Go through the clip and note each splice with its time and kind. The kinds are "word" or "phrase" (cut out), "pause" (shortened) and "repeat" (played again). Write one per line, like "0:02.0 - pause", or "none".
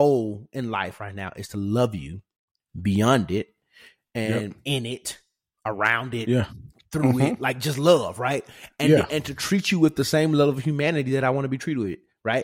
none